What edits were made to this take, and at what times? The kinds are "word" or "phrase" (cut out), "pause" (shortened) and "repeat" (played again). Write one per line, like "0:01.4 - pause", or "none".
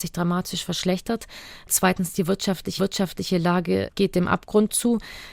0:02.8 - repeat